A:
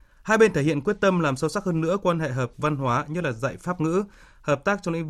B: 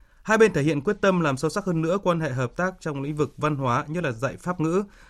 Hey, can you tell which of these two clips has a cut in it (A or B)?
A